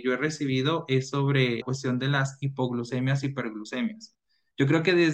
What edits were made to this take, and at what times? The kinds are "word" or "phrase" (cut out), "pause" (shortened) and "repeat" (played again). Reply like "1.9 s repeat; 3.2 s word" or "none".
1.6 s word